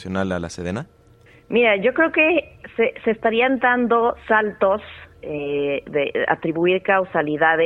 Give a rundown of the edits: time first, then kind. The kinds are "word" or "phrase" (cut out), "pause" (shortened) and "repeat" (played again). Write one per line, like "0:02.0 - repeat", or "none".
0:01.3 - pause